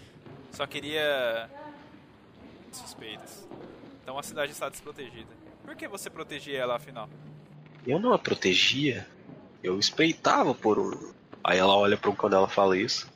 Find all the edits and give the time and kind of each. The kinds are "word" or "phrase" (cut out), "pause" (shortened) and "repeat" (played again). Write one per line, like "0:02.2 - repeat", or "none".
0:02.7 - phrase
0:09.6 - pause
0:12.1 - word